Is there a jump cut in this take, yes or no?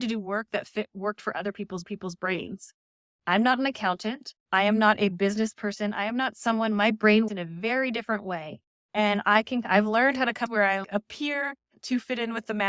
yes